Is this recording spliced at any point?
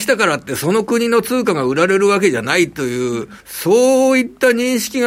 yes; 1 cut; at 3.4 s

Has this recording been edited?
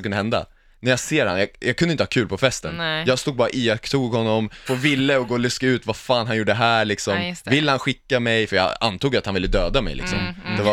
yes; 1 cut; at 4.7 s

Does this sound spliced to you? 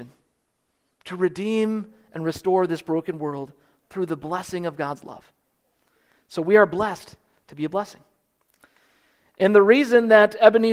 no; 0 cuts

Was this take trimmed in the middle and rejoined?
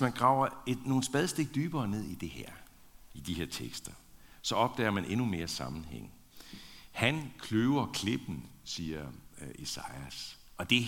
no; 0 cuts

